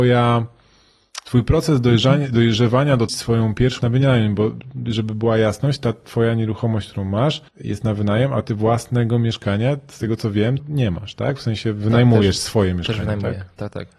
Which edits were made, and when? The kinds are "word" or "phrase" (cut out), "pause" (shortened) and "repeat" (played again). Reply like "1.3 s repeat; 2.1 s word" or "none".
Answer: 3.1 s phrase; 3.8 s word; 7.5 s pause; 10.6 s word